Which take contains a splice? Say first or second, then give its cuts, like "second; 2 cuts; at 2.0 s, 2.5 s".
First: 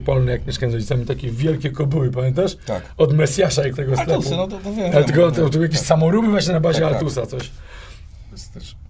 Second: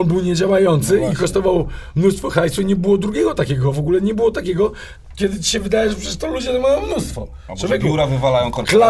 first; 1 cut; at 3.7 s